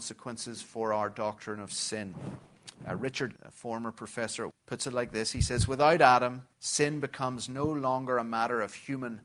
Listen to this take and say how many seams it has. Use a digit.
3